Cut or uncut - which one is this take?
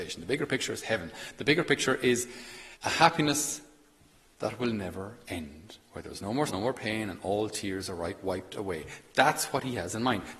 cut